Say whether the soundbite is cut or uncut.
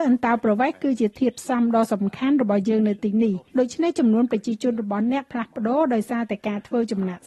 cut